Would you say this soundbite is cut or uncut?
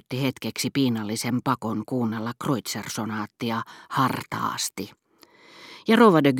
uncut